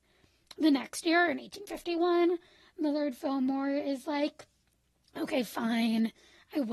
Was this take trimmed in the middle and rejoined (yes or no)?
no